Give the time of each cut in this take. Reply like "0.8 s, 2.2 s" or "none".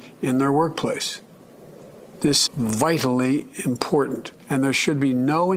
2.5 s, 4.4 s